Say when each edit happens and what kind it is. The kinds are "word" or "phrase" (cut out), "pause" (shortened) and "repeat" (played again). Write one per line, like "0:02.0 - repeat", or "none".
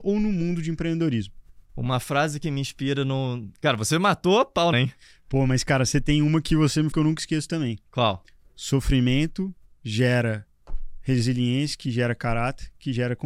0:01.6 - pause
0:04.7 - phrase
0:06.9 - word
0:09.7 - pause